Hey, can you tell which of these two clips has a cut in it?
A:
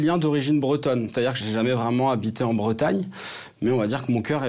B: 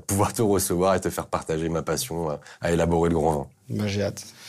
A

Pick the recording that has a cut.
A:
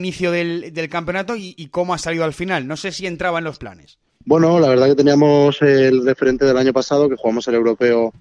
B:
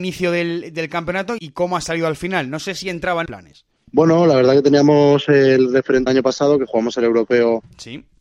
B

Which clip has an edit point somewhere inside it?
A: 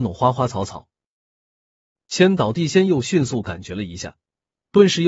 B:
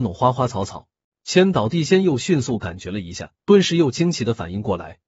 B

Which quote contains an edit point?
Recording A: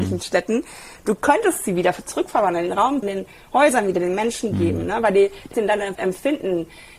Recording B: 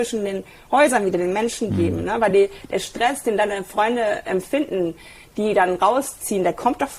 A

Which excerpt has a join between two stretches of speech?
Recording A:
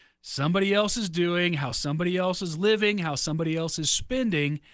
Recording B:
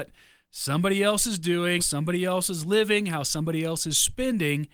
B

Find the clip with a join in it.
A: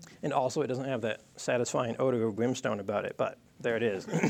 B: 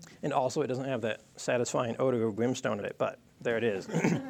B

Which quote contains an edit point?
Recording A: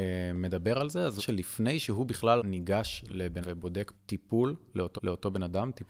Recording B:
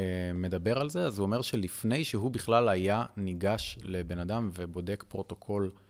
A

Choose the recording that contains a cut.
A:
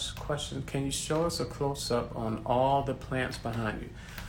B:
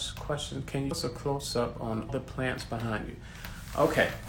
B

